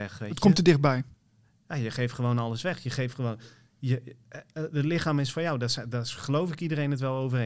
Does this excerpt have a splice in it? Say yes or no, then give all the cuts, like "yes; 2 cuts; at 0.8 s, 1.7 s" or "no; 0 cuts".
no; 0 cuts